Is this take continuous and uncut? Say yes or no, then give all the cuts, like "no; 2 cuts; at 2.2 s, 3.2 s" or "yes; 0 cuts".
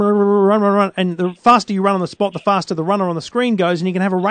yes; 0 cuts